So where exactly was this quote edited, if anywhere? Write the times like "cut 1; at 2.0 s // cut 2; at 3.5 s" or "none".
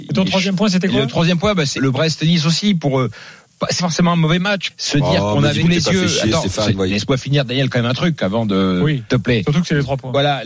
cut 1; at 1.8 s // cut 2; at 3.8 s // cut 3; at 4.7 s // cut 4; at 5.6 s // cut 5; at 6.9 s // cut 6; at 9.1 s